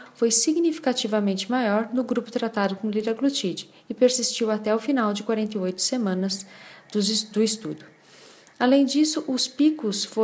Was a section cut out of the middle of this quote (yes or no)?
no